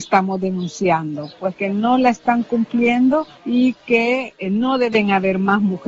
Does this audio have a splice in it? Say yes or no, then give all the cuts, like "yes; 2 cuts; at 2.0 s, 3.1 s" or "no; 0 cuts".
yes; 1 cut; at 3.4 s